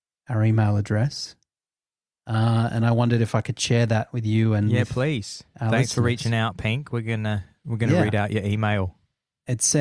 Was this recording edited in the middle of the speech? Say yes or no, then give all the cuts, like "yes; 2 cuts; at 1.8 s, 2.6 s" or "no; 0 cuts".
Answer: no; 0 cuts